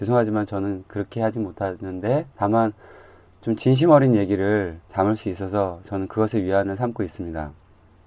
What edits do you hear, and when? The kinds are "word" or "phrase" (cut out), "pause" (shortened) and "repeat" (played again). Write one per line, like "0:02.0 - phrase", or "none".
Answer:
0:02.3 - pause
0:04.8 - pause